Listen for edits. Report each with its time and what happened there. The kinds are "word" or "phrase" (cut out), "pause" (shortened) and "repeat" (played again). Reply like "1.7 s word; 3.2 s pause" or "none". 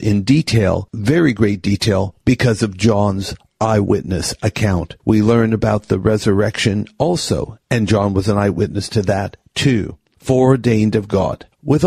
5.0 s pause